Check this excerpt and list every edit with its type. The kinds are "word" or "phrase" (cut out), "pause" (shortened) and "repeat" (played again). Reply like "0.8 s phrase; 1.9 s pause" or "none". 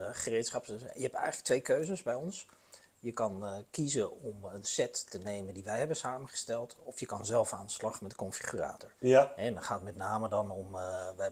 9.0 s pause